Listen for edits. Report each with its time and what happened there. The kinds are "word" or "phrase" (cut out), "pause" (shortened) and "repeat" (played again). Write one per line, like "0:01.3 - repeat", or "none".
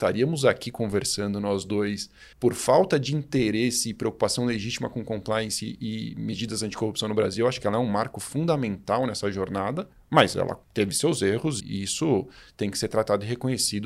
0:02.3 - pause
0:09.9 - pause
0:10.6 - pause
0:11.6 - word